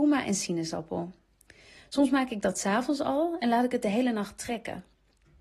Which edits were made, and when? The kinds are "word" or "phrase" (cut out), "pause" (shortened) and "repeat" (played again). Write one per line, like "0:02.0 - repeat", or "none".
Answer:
none